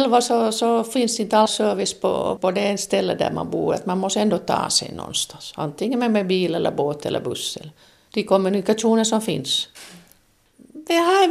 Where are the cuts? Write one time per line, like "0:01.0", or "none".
none